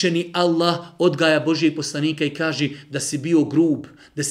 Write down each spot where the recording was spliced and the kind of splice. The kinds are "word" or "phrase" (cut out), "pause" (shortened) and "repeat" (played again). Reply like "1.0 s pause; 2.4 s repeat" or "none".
none